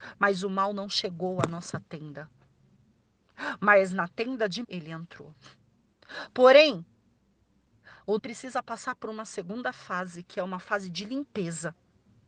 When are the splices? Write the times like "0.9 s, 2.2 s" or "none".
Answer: 4.6 s, 8.2 s